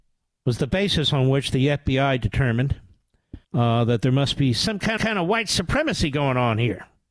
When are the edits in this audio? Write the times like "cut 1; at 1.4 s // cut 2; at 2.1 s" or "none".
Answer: cut 1; at 3.4 s // cut 2; at 5.0 s